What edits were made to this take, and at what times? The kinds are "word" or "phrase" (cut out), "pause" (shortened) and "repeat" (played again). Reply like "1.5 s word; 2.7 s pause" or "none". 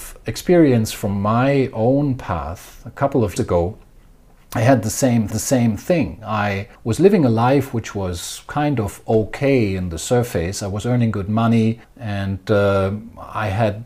3.4 s word; 5.3 s repeat; 6.7 s pause; 11.8 s pause